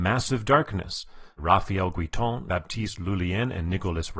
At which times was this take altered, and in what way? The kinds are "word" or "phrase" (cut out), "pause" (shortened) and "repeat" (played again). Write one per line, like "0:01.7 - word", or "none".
0:01.4 - word
0:02.5 - word